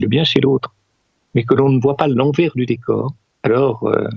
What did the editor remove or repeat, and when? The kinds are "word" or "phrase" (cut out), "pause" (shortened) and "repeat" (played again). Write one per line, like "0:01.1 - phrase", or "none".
0:03.3 - pause